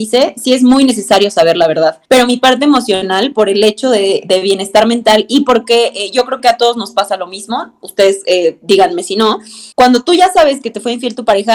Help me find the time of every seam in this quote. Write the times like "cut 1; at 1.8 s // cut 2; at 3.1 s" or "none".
cut 1; at 2.0 s // cut 2; at 9.7 s

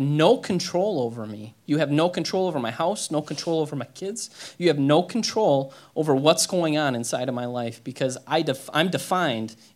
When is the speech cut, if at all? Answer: none

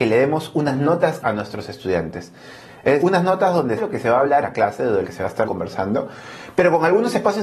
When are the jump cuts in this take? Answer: cut 1; at 1.2 s // cut 2; at 3.0 s // cut 3; at 3.8 s // cut 4; at 4.4 s // cut 5; at 5.0 s // cut 6; at 5.5 s

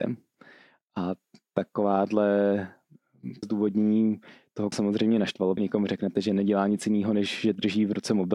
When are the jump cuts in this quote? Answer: cut 1; at 3.4 s // cut 2; at 4.7 s // cut 3; at 5.6 s

